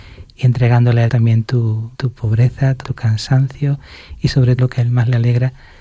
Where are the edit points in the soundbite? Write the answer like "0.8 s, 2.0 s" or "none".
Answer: 1.1 s, 1.9 s, 2.8 s, 4.6 s